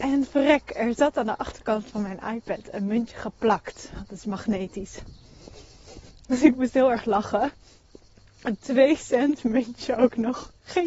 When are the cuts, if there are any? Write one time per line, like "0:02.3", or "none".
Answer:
none